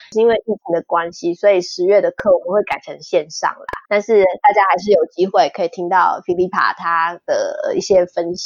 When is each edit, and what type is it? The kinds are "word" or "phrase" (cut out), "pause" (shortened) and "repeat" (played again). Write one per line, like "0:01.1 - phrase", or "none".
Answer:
0:03.8 - pause